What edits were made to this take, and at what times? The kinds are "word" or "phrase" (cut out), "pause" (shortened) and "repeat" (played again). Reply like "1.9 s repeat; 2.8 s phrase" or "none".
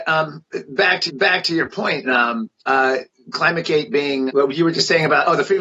1.1 s repeat; 2.1 s word; 2.6 s pause; 4.3 s word